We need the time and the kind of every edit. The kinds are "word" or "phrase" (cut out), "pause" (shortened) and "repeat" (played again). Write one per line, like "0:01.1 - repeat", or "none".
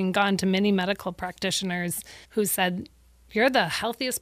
0:02.2 - pause